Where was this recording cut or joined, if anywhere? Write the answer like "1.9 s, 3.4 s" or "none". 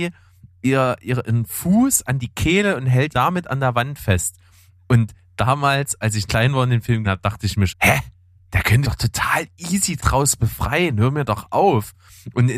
3.1 s, 6.3 s, 7.0 s, 7.7 s, 8.8 s, 10.0 s